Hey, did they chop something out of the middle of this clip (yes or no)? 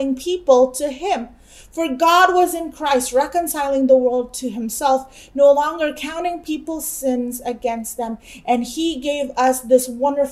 no